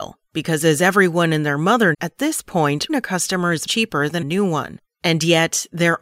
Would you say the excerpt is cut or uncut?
cut